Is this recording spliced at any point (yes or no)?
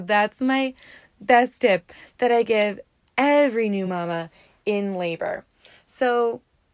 no